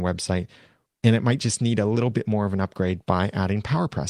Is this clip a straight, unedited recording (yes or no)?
yes